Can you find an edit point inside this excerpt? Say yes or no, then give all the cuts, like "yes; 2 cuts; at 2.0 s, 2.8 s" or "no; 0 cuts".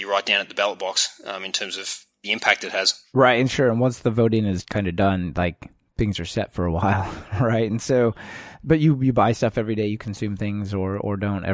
no; 0 cuts